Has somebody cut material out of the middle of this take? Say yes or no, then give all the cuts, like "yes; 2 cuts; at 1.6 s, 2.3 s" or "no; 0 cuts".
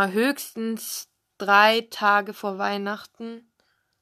yes; 1 cut; at 1.3 s